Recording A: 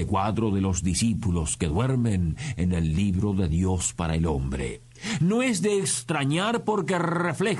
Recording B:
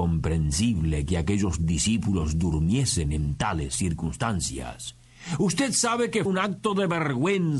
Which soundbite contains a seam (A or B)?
B